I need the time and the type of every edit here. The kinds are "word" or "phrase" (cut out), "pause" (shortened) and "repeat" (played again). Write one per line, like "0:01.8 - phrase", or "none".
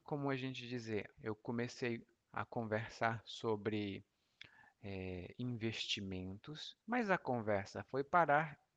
0:01.1 - word
0:06.8 - pause